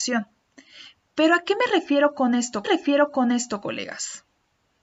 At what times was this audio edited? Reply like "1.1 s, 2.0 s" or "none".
1.0 s, 2.6 s